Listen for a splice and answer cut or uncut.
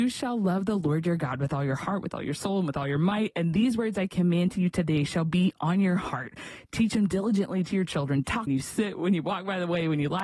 cut